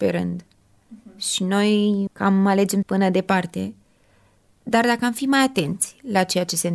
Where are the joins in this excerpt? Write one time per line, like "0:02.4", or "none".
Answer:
0:02.1
0:02.8